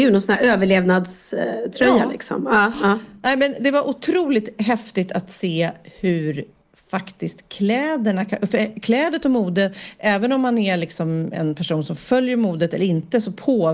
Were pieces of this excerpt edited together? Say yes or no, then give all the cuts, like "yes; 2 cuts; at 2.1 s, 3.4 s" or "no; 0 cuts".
no; 0 cuts